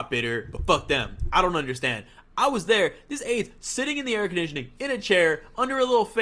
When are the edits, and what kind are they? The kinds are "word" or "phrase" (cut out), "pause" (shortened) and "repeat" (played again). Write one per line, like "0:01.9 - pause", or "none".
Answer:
none